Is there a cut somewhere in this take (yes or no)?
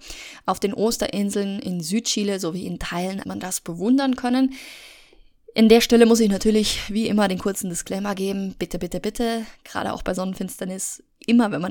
yes